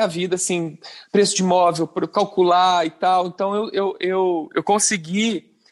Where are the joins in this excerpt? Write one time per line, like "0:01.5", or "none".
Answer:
none